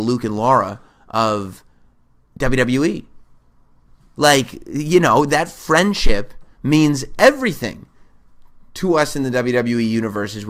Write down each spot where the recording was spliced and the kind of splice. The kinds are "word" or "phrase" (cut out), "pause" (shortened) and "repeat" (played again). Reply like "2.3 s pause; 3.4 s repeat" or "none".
none